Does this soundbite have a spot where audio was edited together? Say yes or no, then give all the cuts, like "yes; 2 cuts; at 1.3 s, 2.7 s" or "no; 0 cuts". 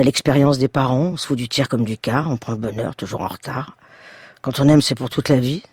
no; 0 cuts